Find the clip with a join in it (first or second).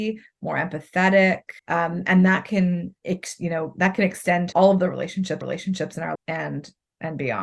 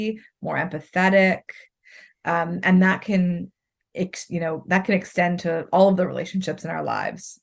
first